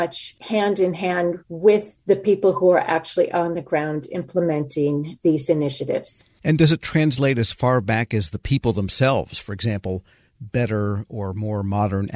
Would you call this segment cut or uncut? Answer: uncut